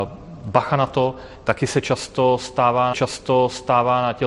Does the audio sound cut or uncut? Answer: cut